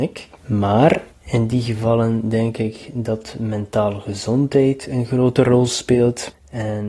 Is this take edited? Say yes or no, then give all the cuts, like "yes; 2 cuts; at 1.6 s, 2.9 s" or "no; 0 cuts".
no; 0 cuts